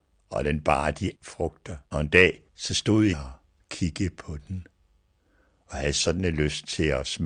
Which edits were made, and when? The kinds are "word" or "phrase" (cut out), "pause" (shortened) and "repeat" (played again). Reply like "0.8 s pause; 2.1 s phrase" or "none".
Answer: 1.2 s phrase; 1.9 s pause; 2.5 s pause; 3.1 s word